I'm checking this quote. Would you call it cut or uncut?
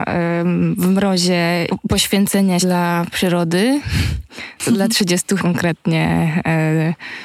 cut